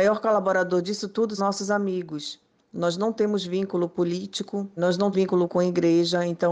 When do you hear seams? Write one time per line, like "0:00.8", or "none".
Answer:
0:01.4
0:04.8
0:05.1